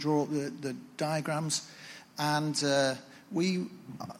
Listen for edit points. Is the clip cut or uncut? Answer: uncut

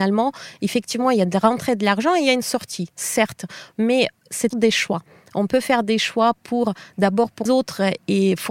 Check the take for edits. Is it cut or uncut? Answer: cut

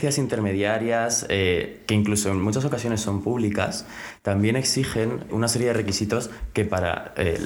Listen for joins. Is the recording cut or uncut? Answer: cut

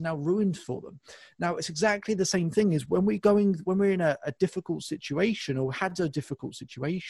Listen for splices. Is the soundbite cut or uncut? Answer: uncut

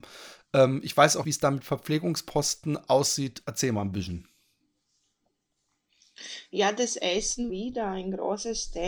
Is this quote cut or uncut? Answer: cut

